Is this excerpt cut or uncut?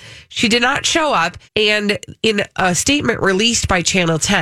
cut